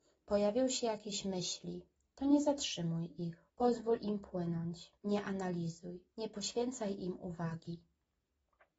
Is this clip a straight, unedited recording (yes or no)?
no